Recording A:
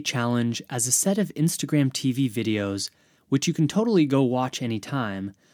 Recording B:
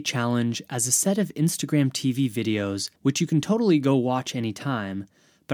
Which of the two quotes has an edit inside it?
B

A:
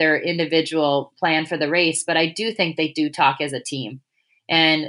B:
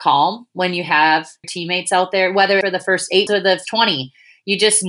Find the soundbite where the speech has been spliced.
B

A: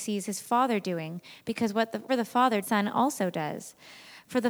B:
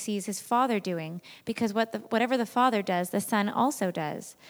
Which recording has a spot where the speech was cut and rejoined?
A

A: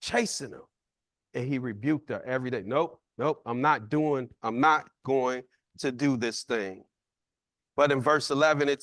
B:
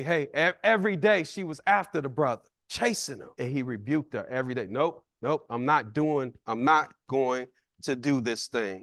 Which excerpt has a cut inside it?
B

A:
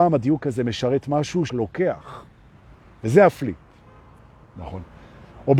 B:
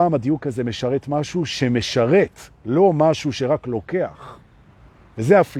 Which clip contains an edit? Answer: A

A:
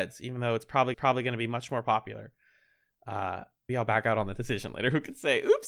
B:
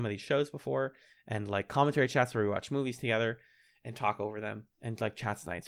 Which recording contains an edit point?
A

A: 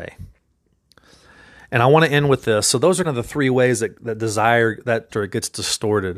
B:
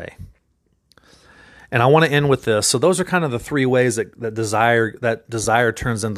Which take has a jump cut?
A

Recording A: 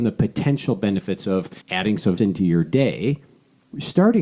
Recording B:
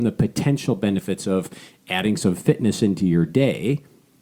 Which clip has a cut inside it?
A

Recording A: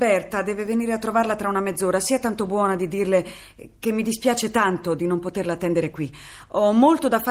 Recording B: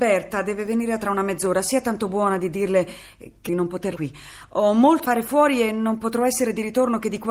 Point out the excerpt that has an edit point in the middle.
B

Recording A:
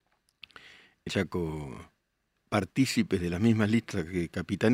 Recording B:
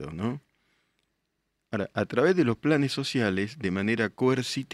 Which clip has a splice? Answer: A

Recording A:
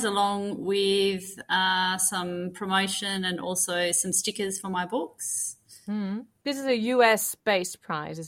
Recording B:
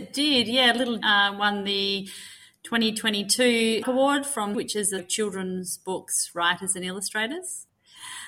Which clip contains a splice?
B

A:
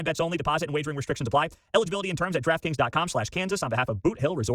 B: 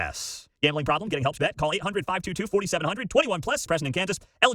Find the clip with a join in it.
B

